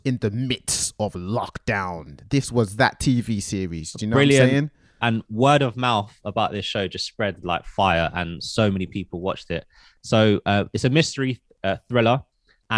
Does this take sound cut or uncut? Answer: uncut